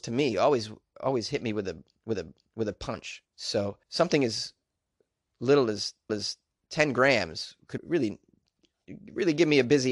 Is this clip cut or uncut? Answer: cut